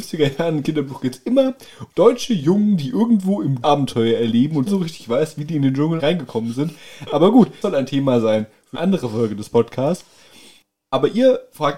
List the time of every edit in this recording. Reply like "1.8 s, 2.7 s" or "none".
1.9 s, 3.6 s, 4.7 s, 6.0 s, 7.6 s, 8.7 s